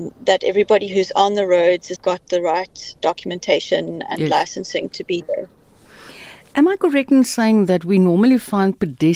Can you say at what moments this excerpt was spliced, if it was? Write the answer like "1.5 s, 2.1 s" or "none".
2.0 s, 3.0 s